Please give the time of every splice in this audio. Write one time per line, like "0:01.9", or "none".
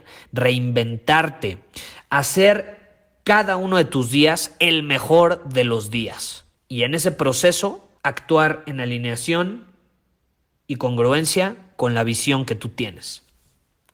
0:06.5
0:08.0